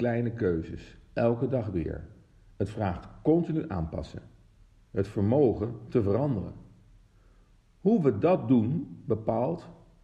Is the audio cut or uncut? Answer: uncut